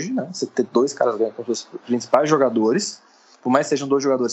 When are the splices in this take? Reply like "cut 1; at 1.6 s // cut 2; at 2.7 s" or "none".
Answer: none